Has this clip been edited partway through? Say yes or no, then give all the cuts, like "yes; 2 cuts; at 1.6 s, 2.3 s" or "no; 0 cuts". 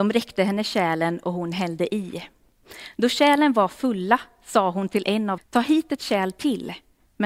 yes; 1 cut; at 5.4 s